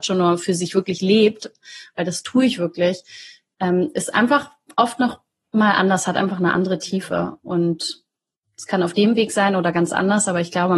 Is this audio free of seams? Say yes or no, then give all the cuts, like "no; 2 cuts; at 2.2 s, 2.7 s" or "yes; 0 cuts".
yes; 0 cuts